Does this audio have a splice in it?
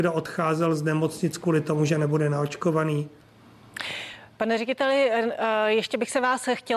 no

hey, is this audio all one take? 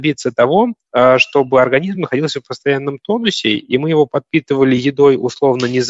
yes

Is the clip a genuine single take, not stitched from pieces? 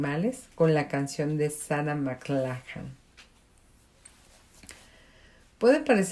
yes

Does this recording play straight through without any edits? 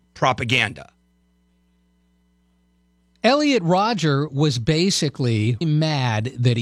no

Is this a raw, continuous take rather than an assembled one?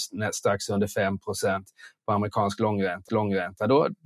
no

